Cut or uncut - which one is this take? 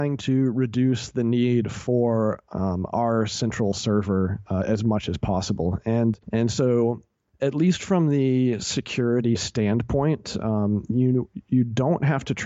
cut